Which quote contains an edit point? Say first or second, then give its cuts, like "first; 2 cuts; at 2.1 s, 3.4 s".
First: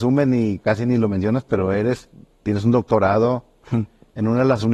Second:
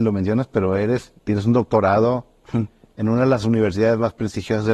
second; 1 cut; at 1.2 s